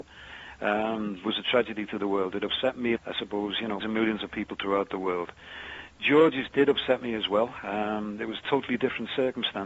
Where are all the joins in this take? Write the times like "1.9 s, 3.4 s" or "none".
3.0 s, 3.8 s, 6.5 s